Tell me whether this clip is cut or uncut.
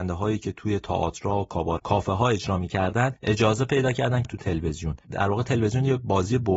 cut